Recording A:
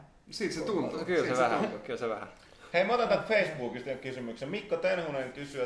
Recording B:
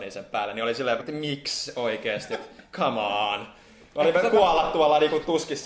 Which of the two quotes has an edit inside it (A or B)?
B